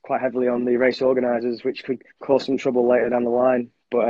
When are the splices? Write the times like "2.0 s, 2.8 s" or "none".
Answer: 2.1 s